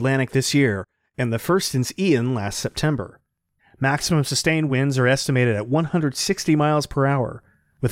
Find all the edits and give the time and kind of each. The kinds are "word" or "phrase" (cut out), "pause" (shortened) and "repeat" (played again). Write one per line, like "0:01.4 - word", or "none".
none